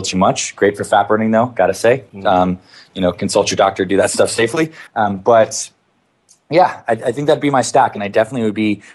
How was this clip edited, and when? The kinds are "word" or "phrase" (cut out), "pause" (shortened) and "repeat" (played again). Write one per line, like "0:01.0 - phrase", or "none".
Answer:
0:02.1 - pause
0:04.9 - pause